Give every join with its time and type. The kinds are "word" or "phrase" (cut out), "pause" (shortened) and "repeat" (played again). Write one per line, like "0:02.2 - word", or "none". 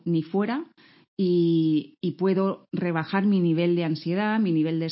none